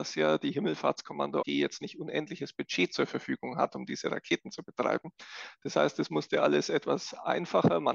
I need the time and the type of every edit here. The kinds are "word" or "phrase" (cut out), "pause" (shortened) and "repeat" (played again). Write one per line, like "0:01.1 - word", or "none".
0:01.4 - word